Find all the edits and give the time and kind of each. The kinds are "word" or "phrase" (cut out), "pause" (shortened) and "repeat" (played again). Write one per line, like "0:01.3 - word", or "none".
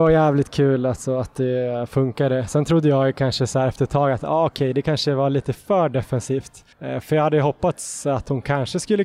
0:06.7 - pause